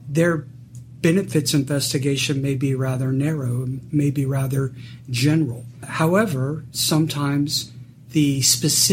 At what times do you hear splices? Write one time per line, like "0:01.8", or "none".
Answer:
none